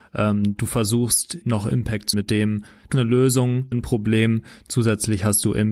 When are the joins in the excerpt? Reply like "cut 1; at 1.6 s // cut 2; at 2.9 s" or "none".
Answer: cut 1; at 1.4 s // cut 2; at 2.1 s // cut 3; at 2.9 s // cut 4; at 3.7 s